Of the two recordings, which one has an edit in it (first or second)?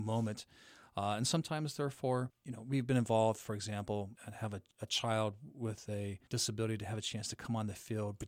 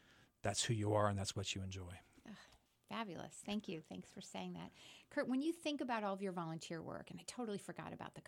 first